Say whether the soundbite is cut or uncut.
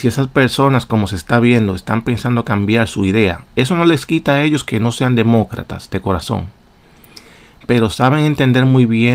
uncut